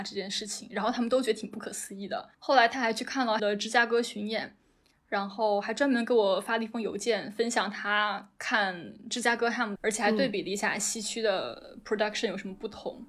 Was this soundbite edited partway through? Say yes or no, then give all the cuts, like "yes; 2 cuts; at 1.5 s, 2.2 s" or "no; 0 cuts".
yes; 3 cuts; at 2.3 s, 3.4 s, 9.8 s